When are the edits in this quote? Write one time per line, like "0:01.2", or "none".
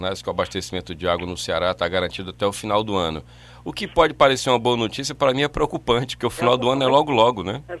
none